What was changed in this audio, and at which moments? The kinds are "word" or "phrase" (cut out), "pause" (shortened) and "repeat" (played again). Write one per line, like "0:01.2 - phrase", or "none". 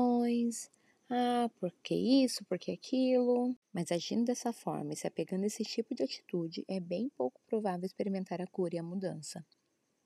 0:03.6 - pause